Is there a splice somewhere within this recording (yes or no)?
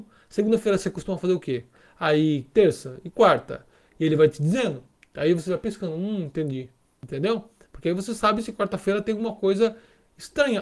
no